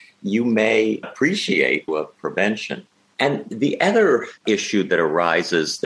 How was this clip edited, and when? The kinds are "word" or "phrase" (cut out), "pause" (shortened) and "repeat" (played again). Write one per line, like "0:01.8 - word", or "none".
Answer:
0:01.0 - word
0:01.9 - phrase
0:03.0 - pause
0:04.4 - pause